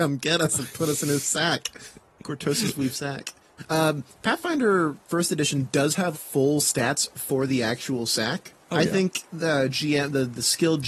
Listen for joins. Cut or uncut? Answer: cut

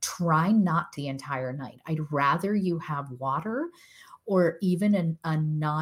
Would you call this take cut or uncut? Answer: cut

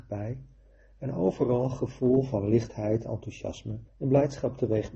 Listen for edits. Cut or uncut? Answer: cut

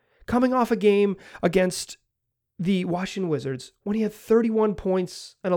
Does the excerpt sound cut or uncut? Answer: uncut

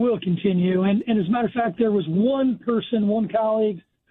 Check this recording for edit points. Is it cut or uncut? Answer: uncut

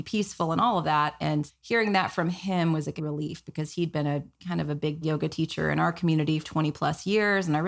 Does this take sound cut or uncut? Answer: cut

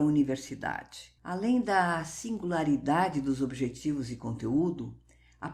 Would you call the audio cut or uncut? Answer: cut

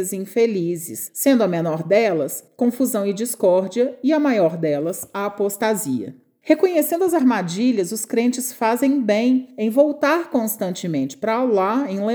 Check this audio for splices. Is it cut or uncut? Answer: uncut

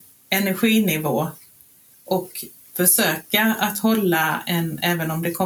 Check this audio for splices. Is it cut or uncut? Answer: uncut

